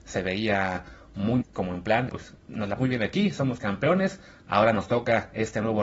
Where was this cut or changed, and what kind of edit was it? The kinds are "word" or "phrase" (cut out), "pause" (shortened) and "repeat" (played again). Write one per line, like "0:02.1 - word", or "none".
0:01.4 - word
0:02.1 - word
0:02.8 - word